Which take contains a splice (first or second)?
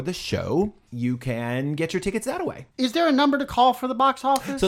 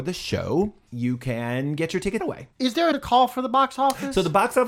second